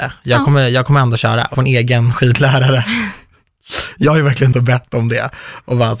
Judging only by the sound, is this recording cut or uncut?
cut